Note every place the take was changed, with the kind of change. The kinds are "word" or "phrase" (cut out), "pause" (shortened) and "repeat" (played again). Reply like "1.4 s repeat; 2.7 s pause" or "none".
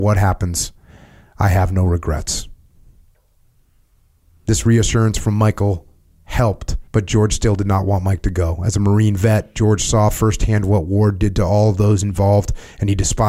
6.9 s pause

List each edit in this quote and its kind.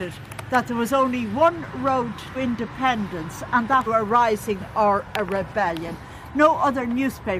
2.3 s word; 3.9 s phrase

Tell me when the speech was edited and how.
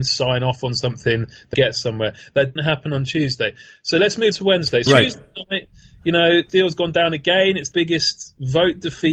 1.5 s word; 2.6 s word; 4.3 s word; 4.9 s word; 6.5 s word; 7.7 s word

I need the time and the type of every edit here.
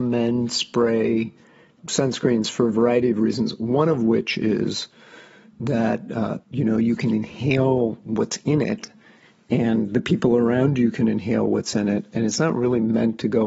1.8 s word; 6.4 s pause

